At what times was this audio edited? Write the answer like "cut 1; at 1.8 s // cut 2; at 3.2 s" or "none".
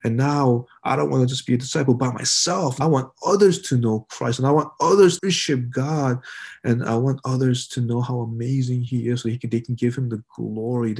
cut 1; at 2.8 s // cut 2; at 5.2 s